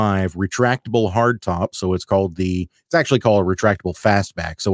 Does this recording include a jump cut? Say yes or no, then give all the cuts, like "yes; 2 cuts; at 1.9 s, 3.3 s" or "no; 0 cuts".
no; 0 cuts